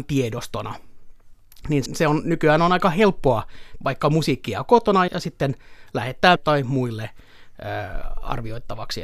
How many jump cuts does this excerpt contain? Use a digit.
4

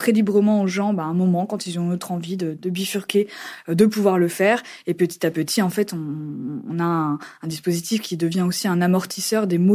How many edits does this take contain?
0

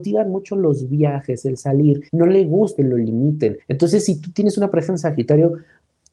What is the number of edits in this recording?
3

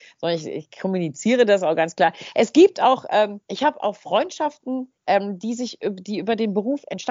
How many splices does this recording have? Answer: 2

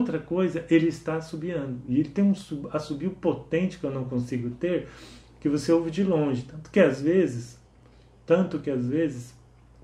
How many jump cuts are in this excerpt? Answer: 0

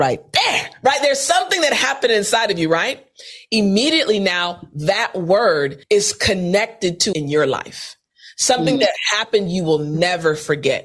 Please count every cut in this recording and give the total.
2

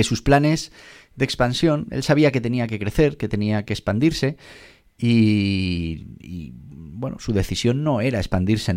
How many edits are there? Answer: 0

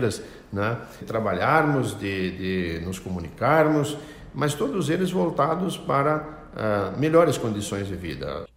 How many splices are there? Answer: 1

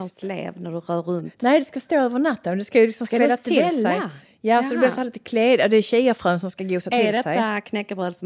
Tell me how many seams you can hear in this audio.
0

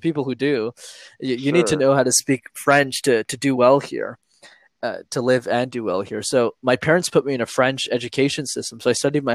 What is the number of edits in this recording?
0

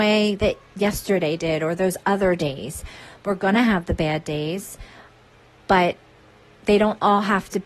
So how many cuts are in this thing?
0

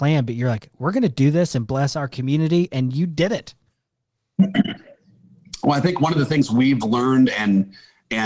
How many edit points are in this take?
0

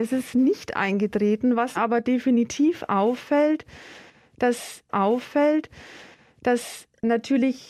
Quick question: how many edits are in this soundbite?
2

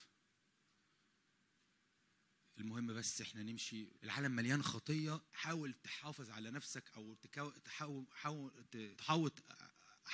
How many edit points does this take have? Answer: 3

